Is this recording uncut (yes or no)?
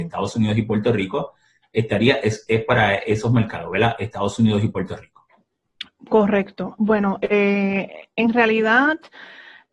yes